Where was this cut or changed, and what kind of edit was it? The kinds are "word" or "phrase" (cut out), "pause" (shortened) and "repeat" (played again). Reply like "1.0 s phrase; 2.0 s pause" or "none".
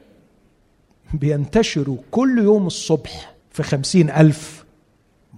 3.4 s pause